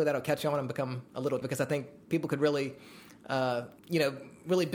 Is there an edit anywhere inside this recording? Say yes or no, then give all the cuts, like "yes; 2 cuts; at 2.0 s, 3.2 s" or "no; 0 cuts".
yes; 2 cuts; at 1.4 s, 3.8 s